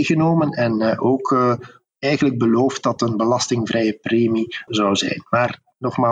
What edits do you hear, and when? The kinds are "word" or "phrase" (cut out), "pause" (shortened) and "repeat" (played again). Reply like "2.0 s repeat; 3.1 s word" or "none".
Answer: 3.0 s word; 4.7 s word